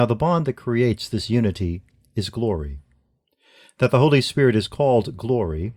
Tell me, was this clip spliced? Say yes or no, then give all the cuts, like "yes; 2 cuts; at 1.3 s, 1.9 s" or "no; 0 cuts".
no; 0 cuts